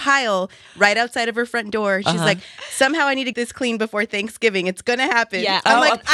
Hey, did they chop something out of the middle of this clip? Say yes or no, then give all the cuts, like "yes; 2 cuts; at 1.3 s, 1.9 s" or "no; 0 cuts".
yes; 1 cut; at 3.3 s